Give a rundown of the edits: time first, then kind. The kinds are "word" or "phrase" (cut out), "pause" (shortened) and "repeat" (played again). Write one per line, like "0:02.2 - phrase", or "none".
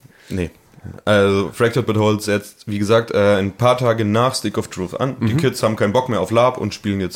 none